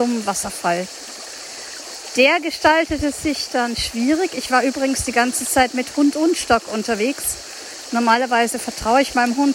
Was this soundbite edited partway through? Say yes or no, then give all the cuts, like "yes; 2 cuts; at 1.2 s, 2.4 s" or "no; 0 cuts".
no; 0 cuts